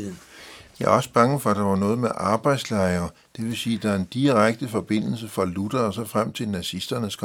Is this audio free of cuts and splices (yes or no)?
yes